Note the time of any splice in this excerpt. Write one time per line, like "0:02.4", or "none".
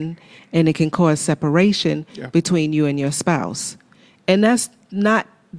none